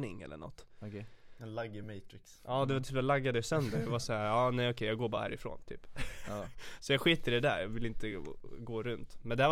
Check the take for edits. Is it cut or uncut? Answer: uncut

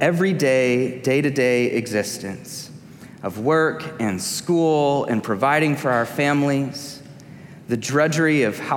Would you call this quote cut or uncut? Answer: uncut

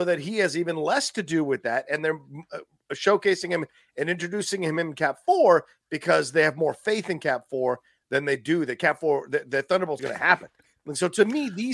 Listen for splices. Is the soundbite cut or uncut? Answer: cut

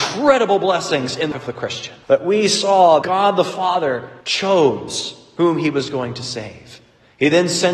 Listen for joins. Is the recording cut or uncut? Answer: cut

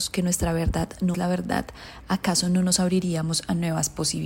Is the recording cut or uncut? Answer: cut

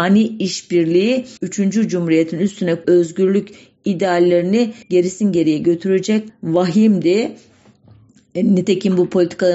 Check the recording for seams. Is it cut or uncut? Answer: cut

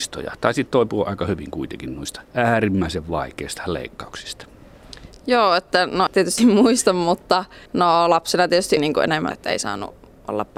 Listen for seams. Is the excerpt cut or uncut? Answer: cut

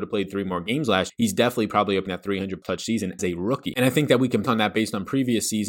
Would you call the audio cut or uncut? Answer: cut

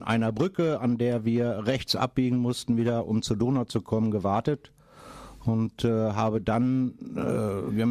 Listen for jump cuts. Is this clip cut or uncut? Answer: uncut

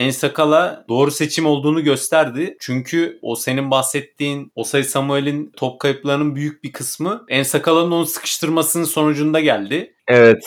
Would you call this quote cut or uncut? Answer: uncut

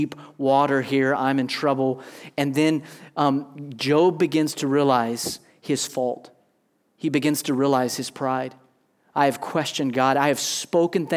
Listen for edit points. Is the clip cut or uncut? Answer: uncut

